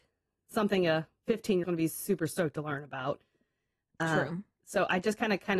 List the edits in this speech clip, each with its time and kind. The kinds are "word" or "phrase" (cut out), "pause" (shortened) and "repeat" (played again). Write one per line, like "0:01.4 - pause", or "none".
0:01.6 - word